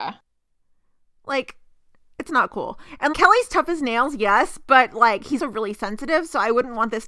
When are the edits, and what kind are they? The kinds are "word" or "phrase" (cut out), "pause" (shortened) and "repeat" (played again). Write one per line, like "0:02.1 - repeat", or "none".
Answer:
0:03.1 - word
0:05.4 - word